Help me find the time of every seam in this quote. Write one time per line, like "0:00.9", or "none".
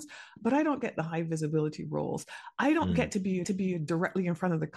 0:03.4

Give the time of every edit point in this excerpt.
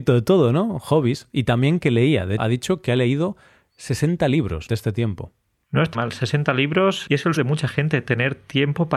0:02.4
0:04.7
0:05.9
0:07.4

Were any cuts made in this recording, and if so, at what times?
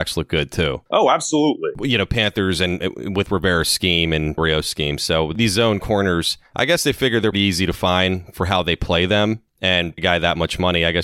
0:04.4
0:07.3
0:10.0

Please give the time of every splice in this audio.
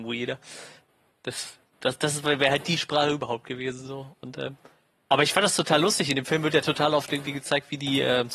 none

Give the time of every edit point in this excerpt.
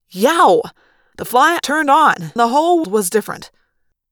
0:01.6
0:02.4
0:02.8

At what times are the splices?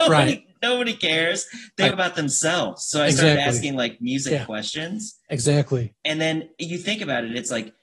0:01.9

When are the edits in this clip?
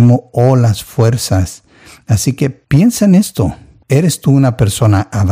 none

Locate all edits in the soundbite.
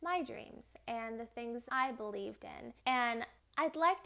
0:01.7
0:02.8

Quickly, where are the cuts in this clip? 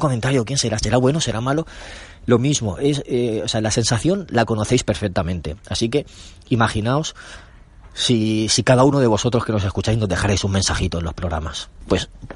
none

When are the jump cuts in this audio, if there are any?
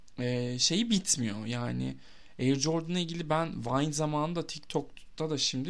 none

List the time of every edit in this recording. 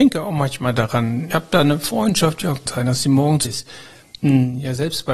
0:01.3
0:02.7
0:03.4

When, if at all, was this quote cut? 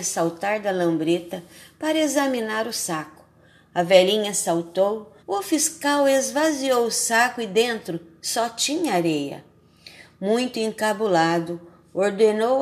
0:05.2

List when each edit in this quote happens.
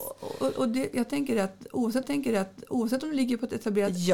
0:02.0

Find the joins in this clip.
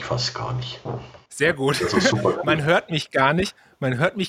0:01.3

